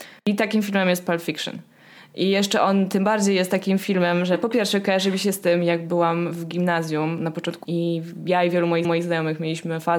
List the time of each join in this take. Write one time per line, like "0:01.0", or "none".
0:07.6
0:08.8